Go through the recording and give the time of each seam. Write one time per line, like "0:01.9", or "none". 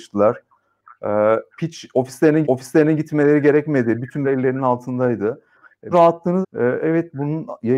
0:01.5
0:02.4
0:04.2
0:05.9
0:06.4